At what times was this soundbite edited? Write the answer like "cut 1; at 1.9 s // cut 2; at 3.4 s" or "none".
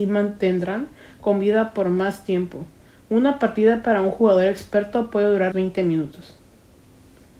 cut 1; at 2.8 s // cut 2; at 5.5 s